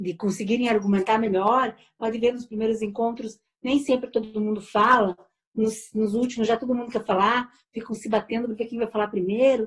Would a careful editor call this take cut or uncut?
uncut